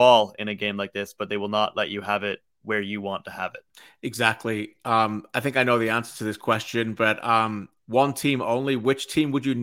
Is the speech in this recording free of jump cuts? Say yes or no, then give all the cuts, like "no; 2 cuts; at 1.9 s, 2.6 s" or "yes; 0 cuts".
no; 2 cuts; at 3.7 s, 7.8 s